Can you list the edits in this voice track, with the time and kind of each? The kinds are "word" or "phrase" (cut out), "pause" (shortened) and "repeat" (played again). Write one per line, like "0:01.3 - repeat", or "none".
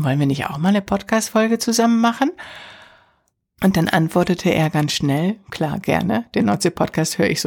none